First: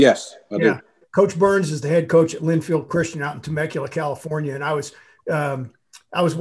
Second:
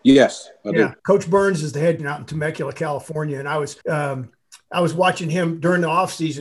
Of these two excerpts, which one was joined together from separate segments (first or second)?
second